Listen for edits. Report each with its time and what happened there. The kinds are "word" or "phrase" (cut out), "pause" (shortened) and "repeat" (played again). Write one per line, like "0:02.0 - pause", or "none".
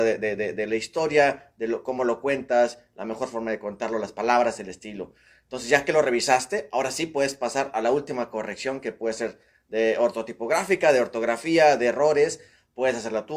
none